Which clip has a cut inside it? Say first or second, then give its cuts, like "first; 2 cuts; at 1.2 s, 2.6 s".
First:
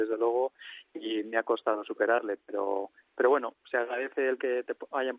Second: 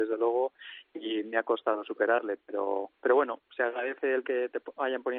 second; 1 cut; at 2.9 s